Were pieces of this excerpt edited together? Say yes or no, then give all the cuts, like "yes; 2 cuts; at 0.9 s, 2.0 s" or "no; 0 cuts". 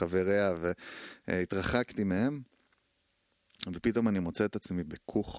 no; 0 cuts